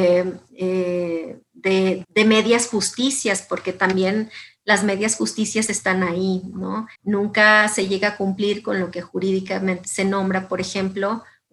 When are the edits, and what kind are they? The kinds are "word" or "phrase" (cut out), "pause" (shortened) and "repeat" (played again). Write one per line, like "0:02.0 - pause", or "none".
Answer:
0:02.0 - word
0:06.9 - pause
0:09.8 - word